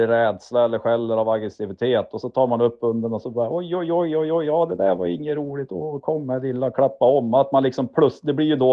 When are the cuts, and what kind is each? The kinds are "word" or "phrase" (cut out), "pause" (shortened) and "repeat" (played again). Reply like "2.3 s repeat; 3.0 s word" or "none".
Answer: none